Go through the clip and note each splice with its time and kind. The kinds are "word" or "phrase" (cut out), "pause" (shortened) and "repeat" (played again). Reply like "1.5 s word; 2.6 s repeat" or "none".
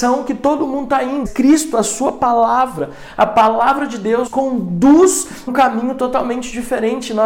1.3 s word; 4.3 s word; 5.5 s word